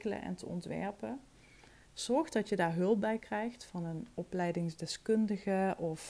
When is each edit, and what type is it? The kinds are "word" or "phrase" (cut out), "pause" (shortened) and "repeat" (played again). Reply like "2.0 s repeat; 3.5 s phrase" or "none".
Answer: none